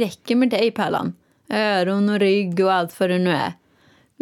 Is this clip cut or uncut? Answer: uncut